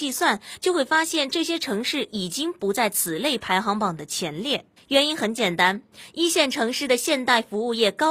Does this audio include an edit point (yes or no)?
yes